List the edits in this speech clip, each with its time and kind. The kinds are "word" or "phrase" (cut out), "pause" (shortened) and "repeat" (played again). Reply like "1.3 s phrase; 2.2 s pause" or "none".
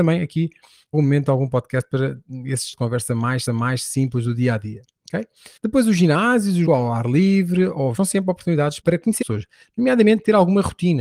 0.9 s word; 2.7 s word; 3.5 s repeat; 5.6 s pause; 6.7 s phrase; 8.0 s word; 8.8 s word; 9.2 s word

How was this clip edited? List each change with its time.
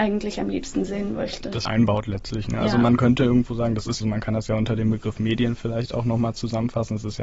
1.7 s phrase; 4.0 s phrase

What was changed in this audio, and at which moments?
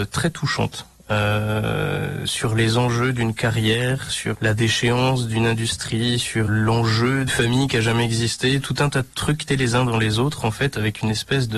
4.3 s word; 6.5 s word; 7.3 s word; 9.5 s word

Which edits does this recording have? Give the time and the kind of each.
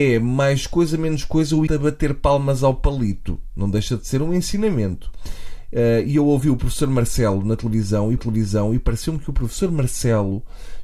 1.7 s word; 8.2 s repeat

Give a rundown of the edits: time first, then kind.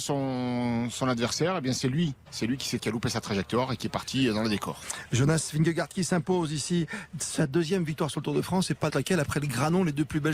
2.8 s word; 8.9 s word

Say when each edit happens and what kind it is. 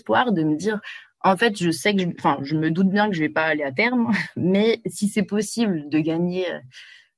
none

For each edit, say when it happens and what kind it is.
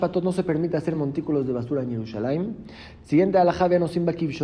none

